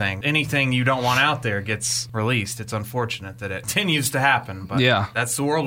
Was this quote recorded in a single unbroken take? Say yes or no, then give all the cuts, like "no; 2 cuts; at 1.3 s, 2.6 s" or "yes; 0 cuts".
yes; 0 cuts